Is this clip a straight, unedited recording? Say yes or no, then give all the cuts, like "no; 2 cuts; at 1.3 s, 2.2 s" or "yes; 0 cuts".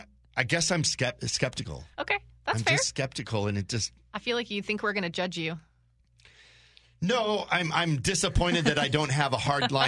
yes; 0 cuts